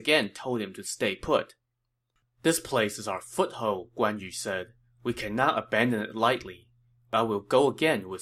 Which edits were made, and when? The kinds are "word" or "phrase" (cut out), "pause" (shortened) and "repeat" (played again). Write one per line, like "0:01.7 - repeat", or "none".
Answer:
none